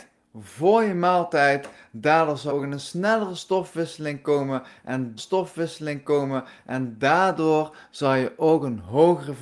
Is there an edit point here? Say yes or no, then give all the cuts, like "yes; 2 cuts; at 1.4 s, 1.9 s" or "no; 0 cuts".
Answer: yes; 2 cuts; at 2.5 s, 5.2 s